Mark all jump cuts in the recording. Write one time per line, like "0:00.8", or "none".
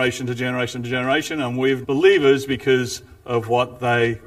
0:01.8